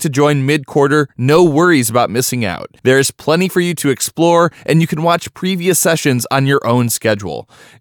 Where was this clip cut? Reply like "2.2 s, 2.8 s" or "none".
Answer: 2.8 s

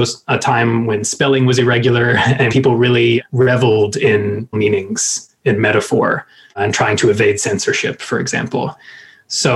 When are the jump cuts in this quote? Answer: 2.5 s, 4.5 s

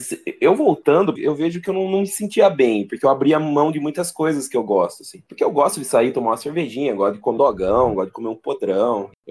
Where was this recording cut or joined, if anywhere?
1.2 s, 7.4 s

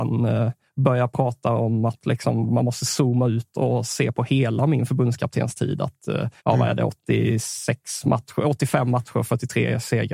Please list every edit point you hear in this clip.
6.4 s

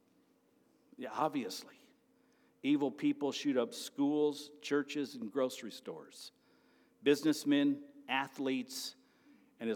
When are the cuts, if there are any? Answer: none

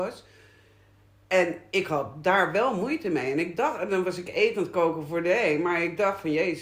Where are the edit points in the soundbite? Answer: none

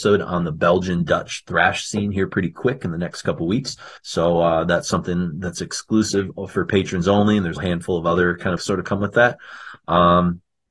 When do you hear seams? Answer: 4.0 s, 7.6 s, 8.6 s

